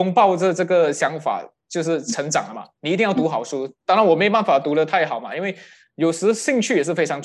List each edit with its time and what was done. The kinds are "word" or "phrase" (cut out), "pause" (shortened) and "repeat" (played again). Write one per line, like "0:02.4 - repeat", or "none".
none